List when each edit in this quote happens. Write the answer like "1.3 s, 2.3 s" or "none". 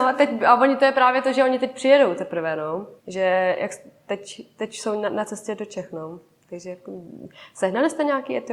3.0 s